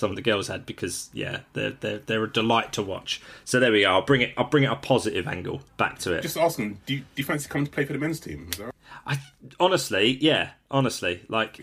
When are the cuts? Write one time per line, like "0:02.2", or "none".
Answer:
0:05.7

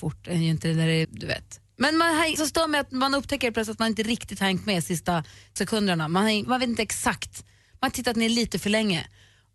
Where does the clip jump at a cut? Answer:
0:01.0
0:02.4
0:05.6
0:06.4

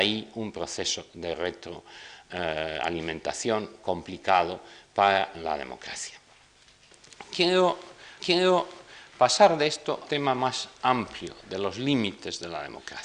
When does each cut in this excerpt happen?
0:05.3
0:08.2
0:10.0

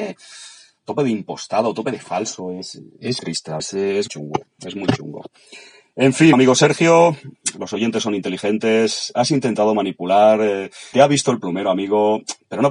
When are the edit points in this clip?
0:03.2
0:03.6
0:04.1
0:06.3
0:07.5
0:10.9

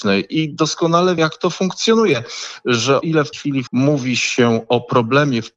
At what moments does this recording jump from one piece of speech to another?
0:01.2
0:03.0
0:03.3
0:03.7

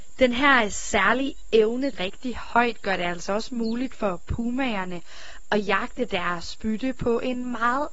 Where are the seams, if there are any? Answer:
0:01.9

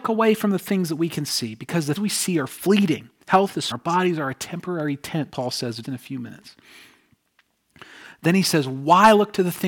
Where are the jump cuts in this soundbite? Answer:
0:02.0
0:03.7
0:05.3
0:05.8

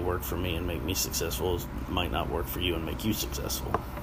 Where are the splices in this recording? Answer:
none

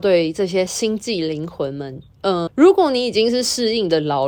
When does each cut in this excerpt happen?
0:02.5

